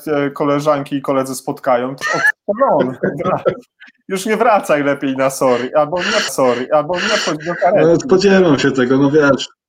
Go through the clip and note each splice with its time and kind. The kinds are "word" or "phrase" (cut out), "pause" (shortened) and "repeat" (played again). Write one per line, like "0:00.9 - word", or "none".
0:02.0 - word
0:06.3 - repeat